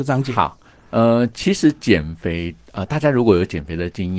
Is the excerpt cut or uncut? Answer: uncut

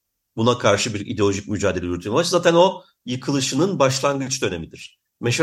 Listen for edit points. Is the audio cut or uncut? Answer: cut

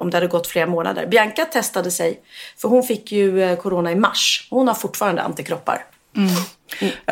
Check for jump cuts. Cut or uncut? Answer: uncut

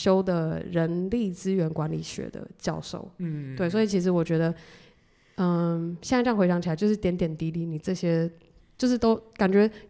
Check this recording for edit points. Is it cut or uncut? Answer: uncut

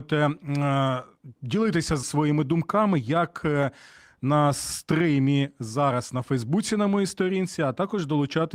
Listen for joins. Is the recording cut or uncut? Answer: cut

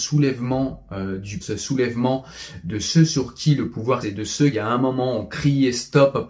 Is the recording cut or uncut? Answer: cut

